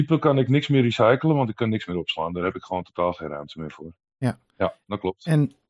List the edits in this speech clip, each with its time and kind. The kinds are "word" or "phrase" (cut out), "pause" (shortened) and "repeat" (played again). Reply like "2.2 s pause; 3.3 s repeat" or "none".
none

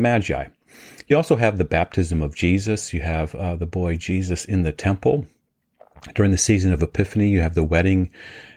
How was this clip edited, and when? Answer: none

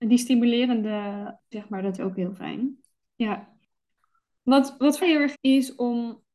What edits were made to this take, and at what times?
1.5 s word; 2.0 s word; 5.0 s word; 5.3 s word

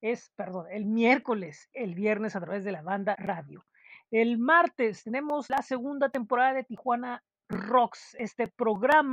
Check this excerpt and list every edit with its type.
1.7 s word; 3.1 s word

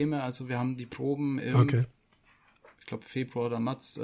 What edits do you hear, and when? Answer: none

